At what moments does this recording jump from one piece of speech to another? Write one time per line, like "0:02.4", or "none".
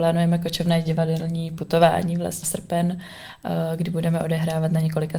0:02.4